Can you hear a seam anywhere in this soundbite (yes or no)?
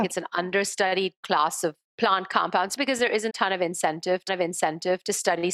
yes